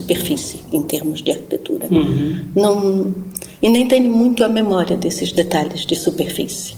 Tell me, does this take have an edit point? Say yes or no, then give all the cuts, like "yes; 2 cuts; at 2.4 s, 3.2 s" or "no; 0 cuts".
no; 0 cuts